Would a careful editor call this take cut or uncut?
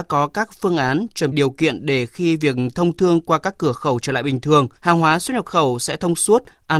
cut